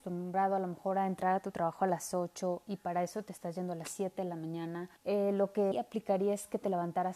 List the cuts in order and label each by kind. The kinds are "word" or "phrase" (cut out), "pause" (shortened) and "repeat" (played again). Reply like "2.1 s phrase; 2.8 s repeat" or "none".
5.0 s pause; 5.7 s word

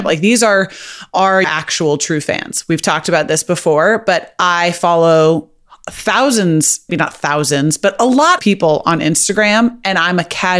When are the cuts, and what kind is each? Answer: 1.4 s word; 6.9 s word; 8.4 s word

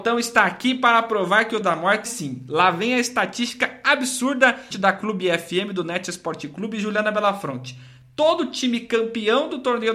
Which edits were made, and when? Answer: 1.6 s word; 2.1 s word; 4.7 s word

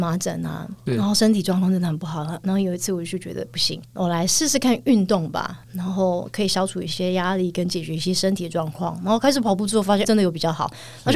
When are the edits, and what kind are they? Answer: 10.0 s word

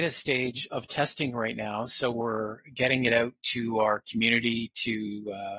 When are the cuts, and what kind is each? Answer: none

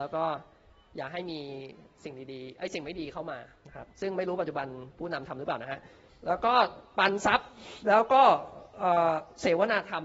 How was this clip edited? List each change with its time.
3.6 s pause; 3.9 s pause; 6.1 s pause

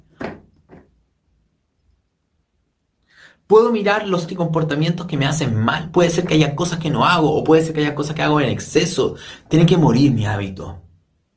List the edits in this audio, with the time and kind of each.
4.3 s word

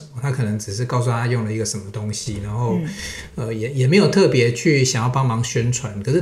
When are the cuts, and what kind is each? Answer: none

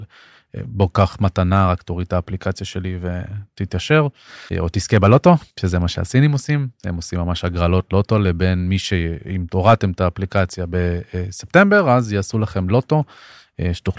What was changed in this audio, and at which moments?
4.5 s pause; 5.5 s pause

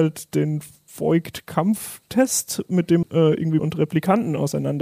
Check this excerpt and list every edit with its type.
3.0 s word; 3.6 s word

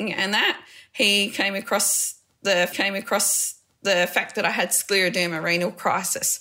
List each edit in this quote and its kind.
2.7 s repeat

